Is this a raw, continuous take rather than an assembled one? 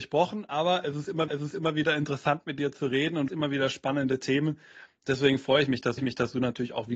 no; 3 cuts; at 1.3 s, 3.3 s, 6.0 s

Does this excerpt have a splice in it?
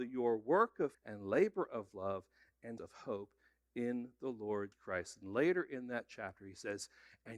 yes; 3 cuts; at 0.9 s, 2.8 s, 4.7 s

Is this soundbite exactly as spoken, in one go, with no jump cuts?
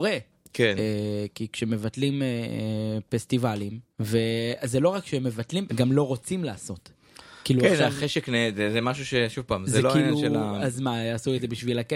no; 2 cuts; at 3.9 s, 5.7 s

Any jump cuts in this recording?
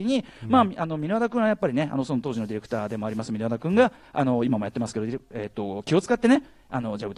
no; 0 cuts

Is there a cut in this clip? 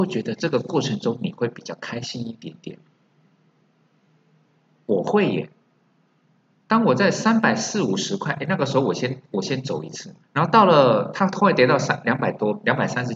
yes; 1 cut; at 10.2 s

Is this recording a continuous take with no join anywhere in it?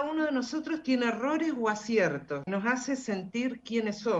no; 1 cut; at 2.5 s

